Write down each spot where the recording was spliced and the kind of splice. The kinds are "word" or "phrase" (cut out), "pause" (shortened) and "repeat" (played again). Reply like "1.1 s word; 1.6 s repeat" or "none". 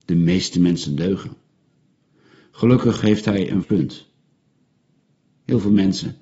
3.6 s word